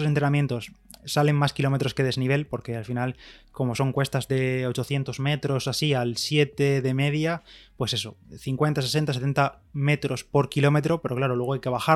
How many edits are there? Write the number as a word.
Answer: zero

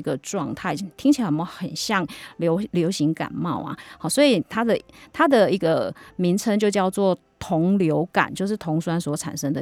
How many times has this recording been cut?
zero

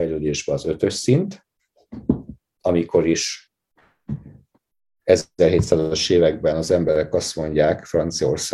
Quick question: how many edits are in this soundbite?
zero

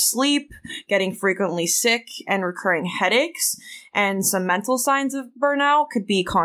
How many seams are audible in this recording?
zero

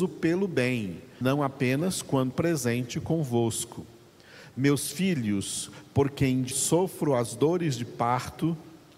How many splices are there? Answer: three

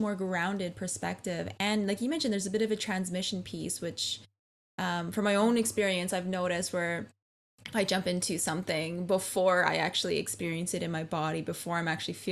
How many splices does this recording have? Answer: zero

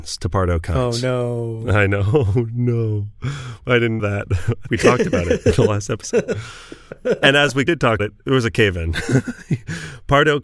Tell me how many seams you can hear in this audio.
four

